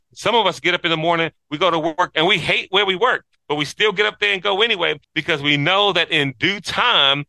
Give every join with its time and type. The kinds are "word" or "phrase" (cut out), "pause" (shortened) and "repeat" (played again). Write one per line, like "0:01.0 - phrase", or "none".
0:05.0 - pause